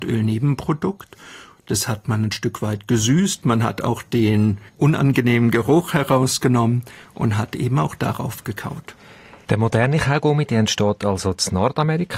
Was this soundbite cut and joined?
yes; 1 cut; at 4.7 s

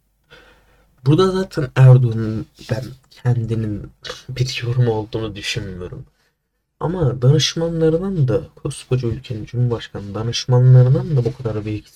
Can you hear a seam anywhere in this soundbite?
no; 0 cuts

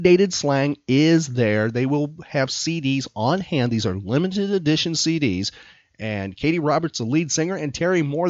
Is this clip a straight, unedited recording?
yes; 0 cuts

